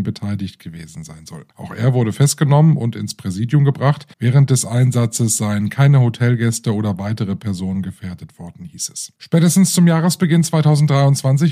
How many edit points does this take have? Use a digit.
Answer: 3